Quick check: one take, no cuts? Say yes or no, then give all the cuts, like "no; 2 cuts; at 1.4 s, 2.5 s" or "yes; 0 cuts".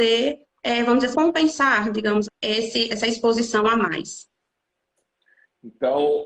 no; 3 cuts; at 1.1 s, 2.2 s, 2.9 s